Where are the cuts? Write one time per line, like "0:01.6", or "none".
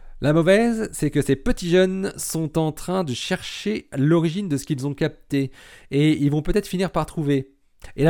none